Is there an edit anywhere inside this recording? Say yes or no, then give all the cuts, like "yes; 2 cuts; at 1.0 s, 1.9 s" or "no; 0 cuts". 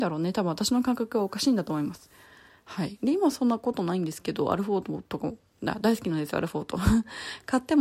no; 0 cuts